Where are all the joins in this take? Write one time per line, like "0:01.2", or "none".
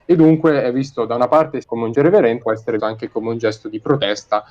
0:01.6
0:01.9
0:02.4
0:02.8